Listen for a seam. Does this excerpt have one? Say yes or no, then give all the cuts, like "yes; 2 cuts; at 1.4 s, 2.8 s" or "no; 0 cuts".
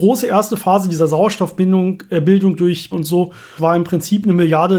yes; 2 cuts; at 2.9 s, 3.6 s